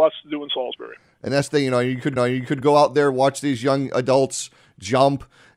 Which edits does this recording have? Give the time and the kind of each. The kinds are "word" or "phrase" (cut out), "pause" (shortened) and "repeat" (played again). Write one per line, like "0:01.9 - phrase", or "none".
0:02.2 - repeat